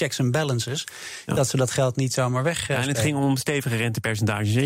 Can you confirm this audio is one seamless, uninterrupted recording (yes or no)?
yes